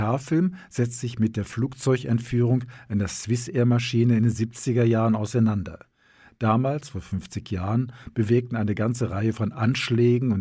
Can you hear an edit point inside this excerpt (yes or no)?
no